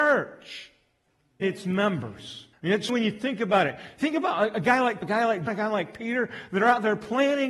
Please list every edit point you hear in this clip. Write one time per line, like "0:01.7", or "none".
0:01.4
0:02.5
0:02.9
0:05.0
0:05.5